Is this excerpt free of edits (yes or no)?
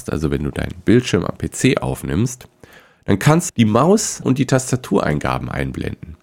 no